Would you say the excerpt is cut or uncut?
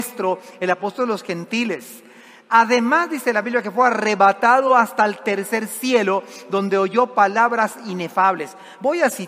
uncut